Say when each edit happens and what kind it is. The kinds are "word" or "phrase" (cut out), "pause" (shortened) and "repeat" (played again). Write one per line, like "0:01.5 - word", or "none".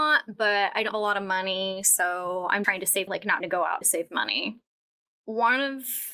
0:00.9 - word
0:02.6 - word
0:03.1 - word
0:03.4 - word
0:03.8 - word